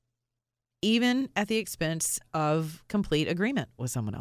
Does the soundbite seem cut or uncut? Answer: uncut